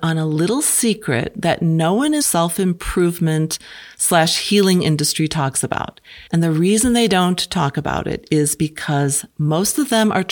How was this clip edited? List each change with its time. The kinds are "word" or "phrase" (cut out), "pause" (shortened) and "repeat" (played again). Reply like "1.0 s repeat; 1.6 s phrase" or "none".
2.2 s phrase; 6.3 s pause